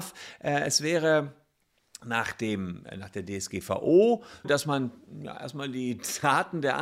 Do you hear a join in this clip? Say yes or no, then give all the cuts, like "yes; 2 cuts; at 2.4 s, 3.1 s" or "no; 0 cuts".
yes; 1 cut; at 4.4 s